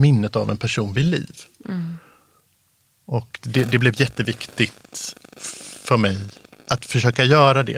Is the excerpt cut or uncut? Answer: cut